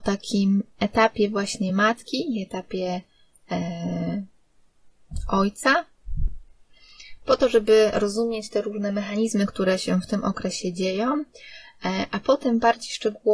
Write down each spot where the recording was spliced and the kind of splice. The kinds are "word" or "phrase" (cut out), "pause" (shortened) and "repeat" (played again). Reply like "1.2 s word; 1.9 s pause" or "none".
none